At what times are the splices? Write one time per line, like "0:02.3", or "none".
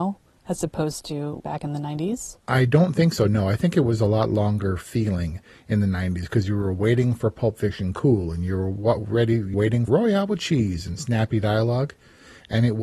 0:01.4
0:02.4
0:09.5
0:09.9